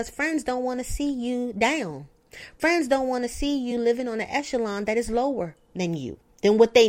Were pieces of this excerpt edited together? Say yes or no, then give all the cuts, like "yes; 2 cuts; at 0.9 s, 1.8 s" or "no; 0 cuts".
no; 0 cuts